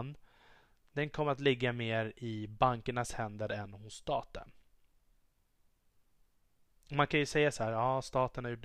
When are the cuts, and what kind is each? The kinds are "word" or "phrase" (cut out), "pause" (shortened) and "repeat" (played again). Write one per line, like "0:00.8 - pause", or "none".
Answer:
none